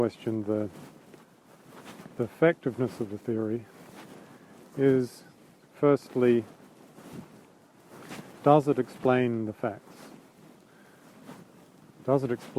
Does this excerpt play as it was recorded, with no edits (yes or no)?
yes